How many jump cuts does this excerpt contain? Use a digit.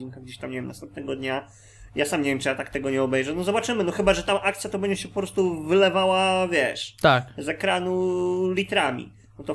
0